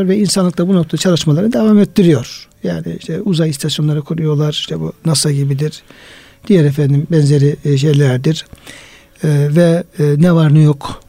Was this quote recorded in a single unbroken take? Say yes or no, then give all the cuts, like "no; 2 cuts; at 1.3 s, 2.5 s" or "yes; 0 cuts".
yes; 0 cuts